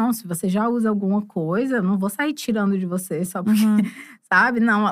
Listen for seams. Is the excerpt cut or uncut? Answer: uncut